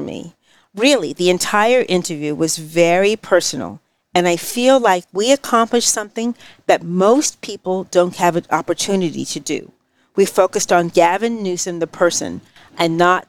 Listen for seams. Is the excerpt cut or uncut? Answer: uncut